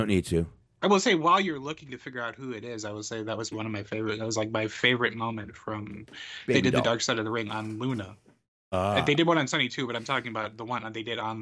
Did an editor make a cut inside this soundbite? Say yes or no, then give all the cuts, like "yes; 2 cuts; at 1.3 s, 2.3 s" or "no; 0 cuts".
yes; 1 cut; at 3.5 s